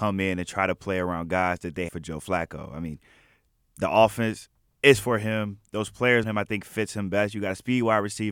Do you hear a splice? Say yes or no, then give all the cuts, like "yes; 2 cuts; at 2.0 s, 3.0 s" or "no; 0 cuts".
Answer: yes; 2 cuts; at 1.9 s, 6.2 s